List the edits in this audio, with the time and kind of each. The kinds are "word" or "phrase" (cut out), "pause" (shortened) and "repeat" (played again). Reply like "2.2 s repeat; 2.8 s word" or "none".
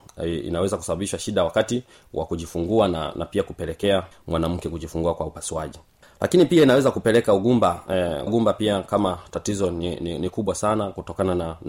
8.3 s word